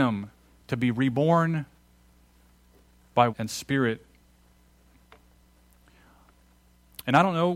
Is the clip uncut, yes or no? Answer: no